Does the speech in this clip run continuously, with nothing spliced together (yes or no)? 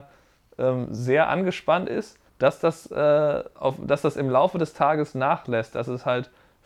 no